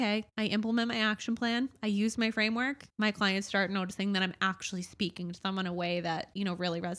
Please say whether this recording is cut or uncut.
cut